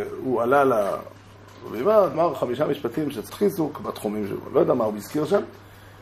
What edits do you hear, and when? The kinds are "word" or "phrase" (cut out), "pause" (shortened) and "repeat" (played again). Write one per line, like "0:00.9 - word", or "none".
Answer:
0:02.1 - word
0:03.3 - word
0:03.8 - word